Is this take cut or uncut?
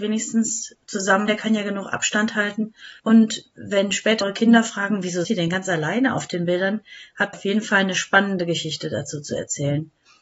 cut